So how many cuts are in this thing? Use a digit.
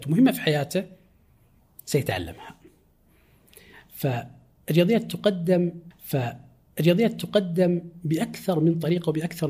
1